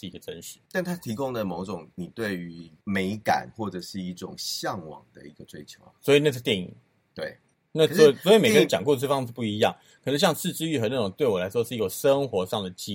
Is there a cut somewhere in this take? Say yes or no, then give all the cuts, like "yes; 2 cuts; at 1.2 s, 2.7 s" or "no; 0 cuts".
yes; 2 cuts; at 1.9 s, 7.5 s